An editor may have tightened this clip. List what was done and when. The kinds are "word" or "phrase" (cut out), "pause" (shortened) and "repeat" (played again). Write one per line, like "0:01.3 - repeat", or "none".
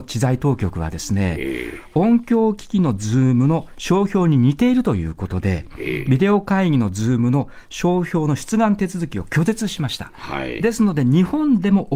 none

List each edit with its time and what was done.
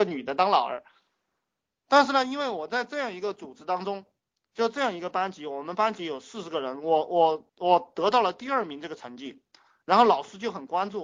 0:07.5 - pause

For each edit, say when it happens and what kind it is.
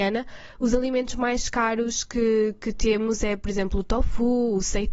none

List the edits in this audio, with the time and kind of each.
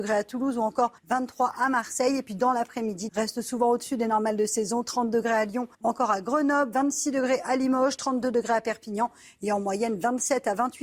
0:01.0 - pause
0:03.1 - phrase
0:05.7 - pause

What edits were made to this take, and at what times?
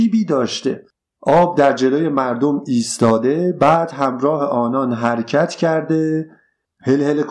none

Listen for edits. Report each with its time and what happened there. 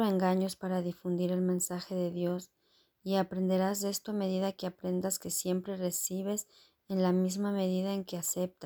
none

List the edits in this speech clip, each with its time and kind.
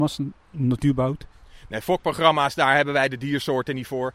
none

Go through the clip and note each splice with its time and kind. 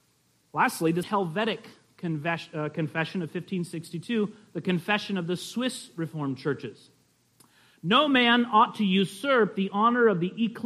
0:01.0 - word

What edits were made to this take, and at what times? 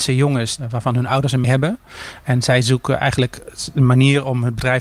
0:01.4 - word

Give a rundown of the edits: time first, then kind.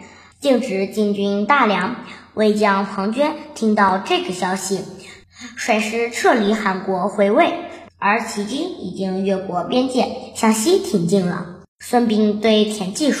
0:07.9 - pause
0:11.7 - pause

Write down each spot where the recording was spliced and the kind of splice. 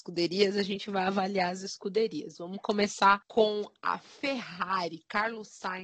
0:03.2 - pause

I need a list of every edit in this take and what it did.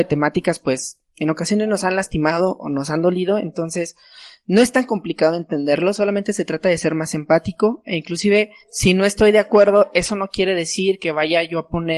0:08.6 - pause

